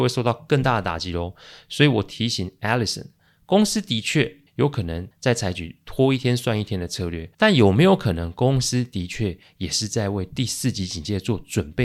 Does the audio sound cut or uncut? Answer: cut